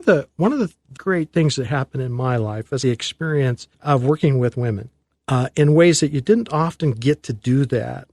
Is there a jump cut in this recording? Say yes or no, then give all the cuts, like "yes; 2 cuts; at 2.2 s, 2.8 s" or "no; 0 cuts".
yes; 4 cuts; at 1.0 s, 2.8 s, 3.7 s, 5.1 s